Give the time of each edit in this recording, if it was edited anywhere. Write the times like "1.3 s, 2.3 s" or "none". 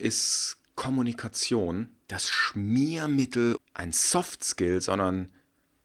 2.0 s, 3.6 s